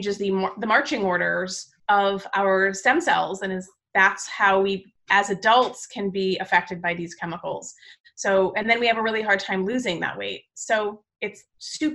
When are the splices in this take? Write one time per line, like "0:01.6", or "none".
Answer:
none